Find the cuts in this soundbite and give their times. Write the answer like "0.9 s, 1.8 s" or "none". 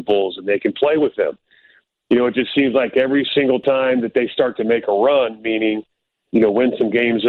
none

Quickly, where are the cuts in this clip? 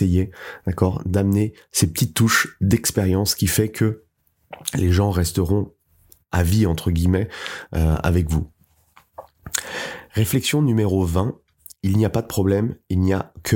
none

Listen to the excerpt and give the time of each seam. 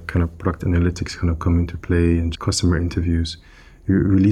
2.3 s

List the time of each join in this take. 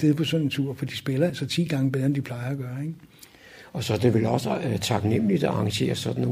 none

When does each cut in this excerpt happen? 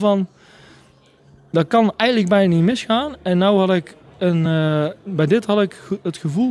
none

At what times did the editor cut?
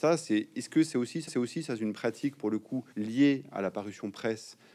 1.3 s, 2.9 s

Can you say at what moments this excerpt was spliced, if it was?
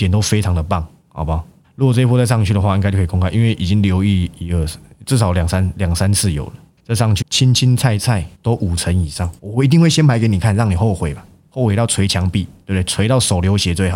1.6 s, 7.2 s, 8.3 s, 9.4 s

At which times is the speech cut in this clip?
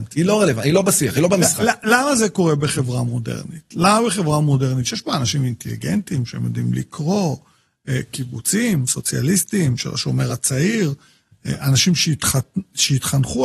none

